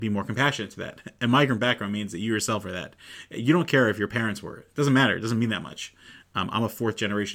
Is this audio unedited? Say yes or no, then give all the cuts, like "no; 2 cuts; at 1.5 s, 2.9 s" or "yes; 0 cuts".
yes; 0 cuts